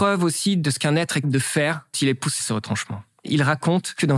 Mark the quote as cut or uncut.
cut